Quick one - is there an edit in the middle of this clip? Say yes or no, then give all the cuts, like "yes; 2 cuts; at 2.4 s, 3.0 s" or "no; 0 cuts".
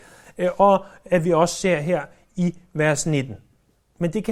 no; 0 cuts